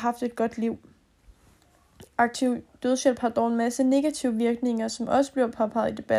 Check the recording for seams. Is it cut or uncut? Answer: uncut